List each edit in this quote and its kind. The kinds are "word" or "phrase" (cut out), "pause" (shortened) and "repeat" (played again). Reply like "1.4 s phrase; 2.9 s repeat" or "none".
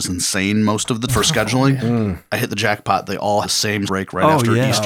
1.1 s word; 3.4 s word; 3.9 s word